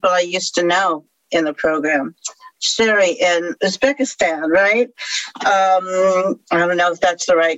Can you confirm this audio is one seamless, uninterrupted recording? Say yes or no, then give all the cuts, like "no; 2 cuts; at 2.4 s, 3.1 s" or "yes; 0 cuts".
no; 2 cuts; at 2.6 s, 3.6 s